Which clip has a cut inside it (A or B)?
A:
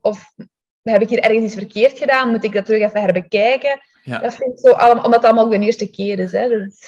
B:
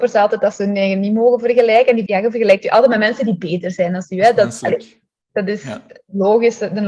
B